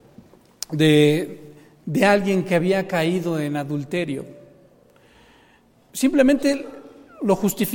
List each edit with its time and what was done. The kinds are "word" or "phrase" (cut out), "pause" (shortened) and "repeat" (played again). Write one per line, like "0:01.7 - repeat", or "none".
none